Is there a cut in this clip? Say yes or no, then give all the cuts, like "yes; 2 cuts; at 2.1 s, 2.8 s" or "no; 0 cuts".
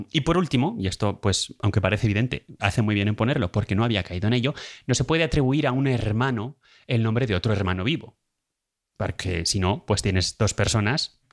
no; 0 cuts